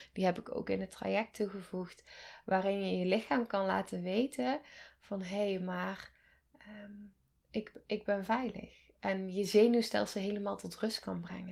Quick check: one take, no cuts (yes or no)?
yes